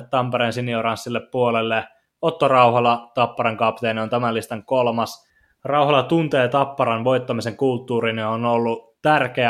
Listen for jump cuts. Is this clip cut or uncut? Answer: uncut